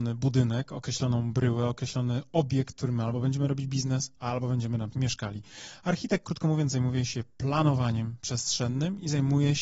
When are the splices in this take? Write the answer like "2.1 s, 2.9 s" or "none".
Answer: 4.9 s